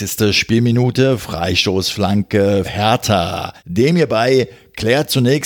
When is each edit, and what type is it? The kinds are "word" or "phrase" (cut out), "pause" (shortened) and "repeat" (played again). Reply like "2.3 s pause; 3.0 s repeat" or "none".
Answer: 2.6 s word; 3.6 s pause